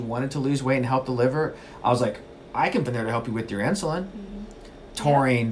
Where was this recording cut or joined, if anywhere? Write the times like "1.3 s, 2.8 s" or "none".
2.9 s